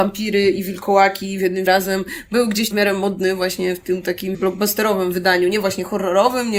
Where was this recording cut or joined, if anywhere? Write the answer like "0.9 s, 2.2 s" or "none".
1.7 s, 2.7 s, 4.3 s